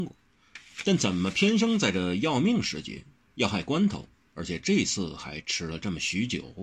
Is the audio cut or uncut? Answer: uncut